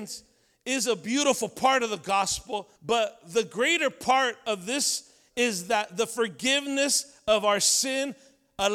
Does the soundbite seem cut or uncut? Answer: cut